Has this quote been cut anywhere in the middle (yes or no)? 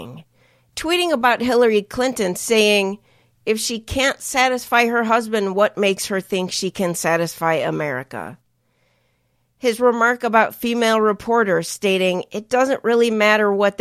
no